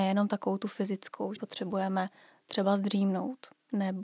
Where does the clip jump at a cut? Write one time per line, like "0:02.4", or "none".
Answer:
0:01.4